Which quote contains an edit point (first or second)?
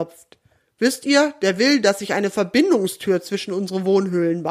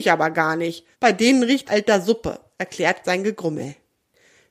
second